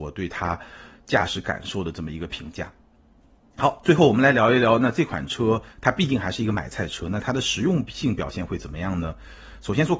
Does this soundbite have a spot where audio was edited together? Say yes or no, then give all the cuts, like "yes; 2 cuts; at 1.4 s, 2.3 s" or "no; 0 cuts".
no; 0 cuts